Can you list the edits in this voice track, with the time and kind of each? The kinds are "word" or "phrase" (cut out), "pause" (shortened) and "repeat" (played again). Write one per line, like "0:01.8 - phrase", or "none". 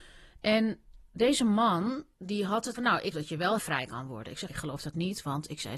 0:02.1 - pause
0:02.7 - word
0:03.1 - word
0:03.6 - word
0:04.5 - word

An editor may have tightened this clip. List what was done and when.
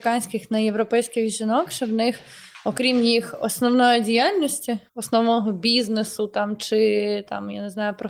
0:04.9 - pause

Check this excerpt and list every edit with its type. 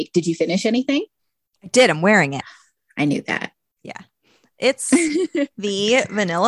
none

